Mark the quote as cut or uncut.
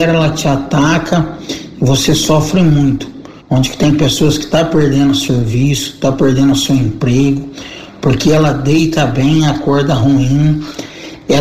cut